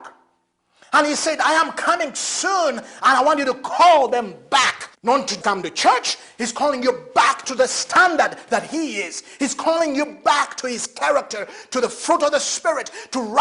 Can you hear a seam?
yes; 2 cuts; at 4.9 s, 5.4 s

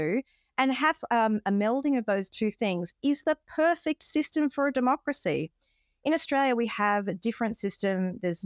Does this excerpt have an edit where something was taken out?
no; 0 cuts

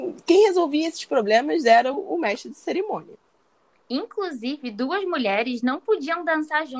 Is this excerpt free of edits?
yes; 0 cuts

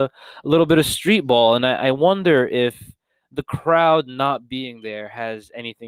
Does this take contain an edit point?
no; 0 cuts

